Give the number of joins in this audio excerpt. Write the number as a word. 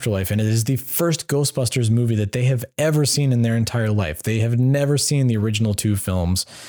zero